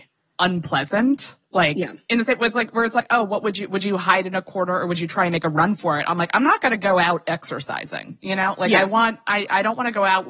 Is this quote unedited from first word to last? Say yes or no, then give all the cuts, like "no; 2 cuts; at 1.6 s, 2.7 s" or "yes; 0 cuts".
no; 1 cut; at 1.5 s